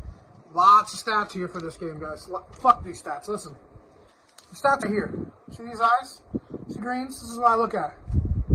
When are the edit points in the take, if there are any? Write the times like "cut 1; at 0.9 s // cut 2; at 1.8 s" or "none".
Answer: cut 1; at 4.8 s // cut 2; at 6.8 s